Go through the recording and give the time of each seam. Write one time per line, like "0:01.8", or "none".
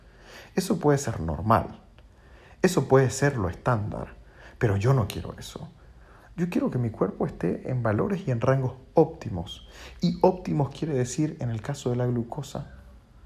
none